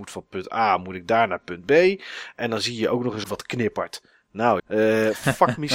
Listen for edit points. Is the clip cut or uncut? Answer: cut